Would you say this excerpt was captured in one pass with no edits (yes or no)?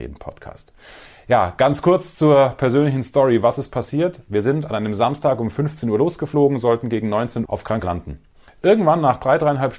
no